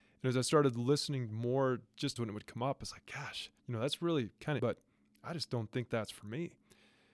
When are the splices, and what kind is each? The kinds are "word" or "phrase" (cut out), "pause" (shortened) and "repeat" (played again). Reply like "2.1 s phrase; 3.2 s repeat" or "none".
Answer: 2.2 s phrase; 3.6 s pause; 4.6 s phrase